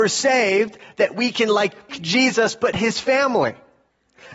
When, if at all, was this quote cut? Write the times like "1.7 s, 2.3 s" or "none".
1.9 s, 2.7 s